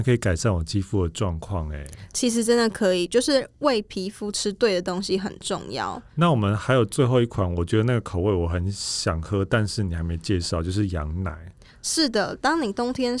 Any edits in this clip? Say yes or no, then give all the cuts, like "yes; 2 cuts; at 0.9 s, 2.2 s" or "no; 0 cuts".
no; 0 cuts